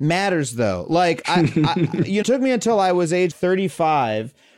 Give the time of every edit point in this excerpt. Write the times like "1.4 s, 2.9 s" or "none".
2.2 s, 3.3 s